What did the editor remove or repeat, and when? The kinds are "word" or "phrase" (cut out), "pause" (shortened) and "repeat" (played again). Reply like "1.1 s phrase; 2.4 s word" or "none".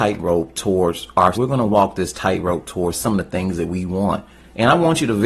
1.3 s phrase